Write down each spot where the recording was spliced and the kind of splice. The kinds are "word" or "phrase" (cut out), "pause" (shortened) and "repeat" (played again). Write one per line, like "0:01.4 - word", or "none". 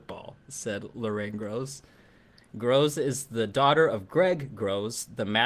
none